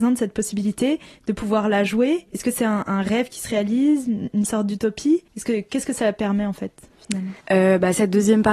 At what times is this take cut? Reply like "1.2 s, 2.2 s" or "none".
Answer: 2.3 s, 5.3 s, 7.4 s